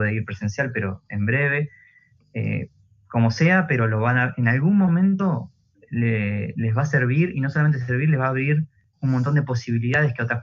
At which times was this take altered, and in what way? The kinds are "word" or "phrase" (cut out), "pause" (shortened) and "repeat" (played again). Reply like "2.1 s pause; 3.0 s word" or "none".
none